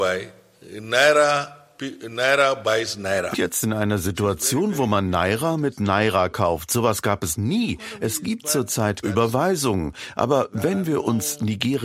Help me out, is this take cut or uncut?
cut